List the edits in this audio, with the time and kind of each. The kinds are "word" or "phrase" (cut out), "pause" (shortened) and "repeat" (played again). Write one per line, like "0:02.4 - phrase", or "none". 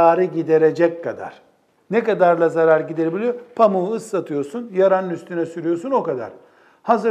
0:01.8 - pause